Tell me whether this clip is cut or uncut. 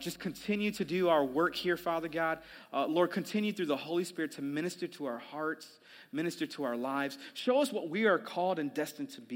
uncut